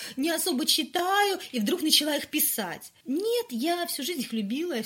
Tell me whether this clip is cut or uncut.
cut